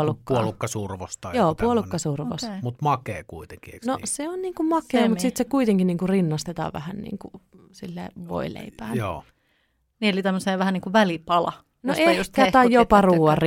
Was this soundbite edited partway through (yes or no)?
no